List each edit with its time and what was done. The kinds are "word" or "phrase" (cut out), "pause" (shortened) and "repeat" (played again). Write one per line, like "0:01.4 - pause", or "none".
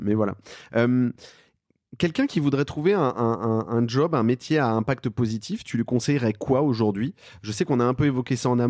none